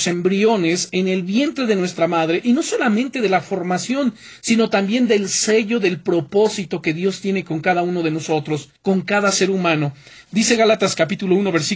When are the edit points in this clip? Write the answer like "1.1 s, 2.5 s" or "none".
8.8 s